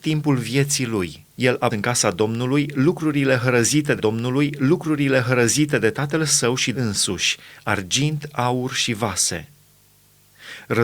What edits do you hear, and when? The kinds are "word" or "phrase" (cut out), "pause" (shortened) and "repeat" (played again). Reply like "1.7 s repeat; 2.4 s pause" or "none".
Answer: 1.3 s pause; 1.7 s word; 4.0 s repeat; 6.7 s phrase